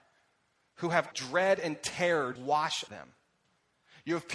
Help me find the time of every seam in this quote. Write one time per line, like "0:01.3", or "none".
0:01.1
0:02.4
0:02.9